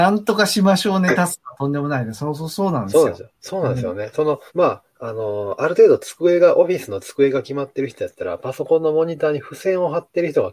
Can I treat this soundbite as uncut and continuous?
no; 2 cuts; at 3.3 s, 4.5 s

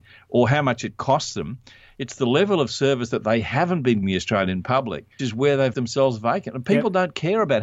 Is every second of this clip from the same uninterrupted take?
no; 3 cuts; at 4.0 s, 5.2 s, 5.7 s

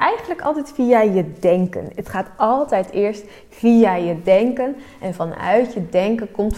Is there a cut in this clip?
no; 0 cuts

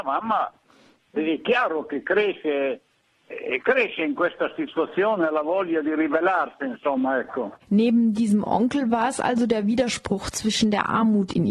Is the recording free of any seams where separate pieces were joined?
yes; 0 cuts

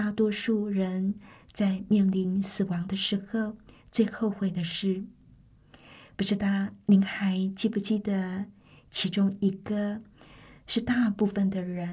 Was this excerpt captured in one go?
yes; 0 cuts

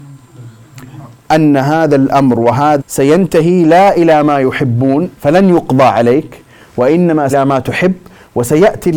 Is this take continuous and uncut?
no; 3 cuts; at 2.8 s, 5.1 s, 7.3 s

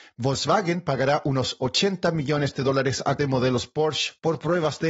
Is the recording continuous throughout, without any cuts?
no; 1 cut; at 3.2 s

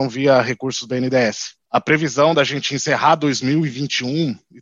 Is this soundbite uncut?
no; 1 cut; at 1.6 s

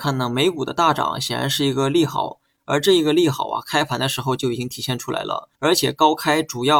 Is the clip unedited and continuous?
no; 1 cut; at 5.5 s

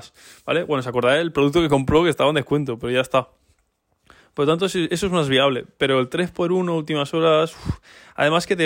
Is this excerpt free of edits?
yes; 0 cuts

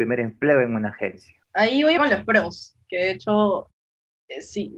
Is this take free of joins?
no; 2 cuts; at 1.4 s, 2.0 s

